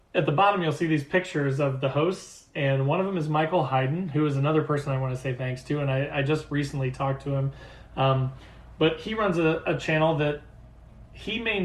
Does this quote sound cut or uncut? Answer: uncut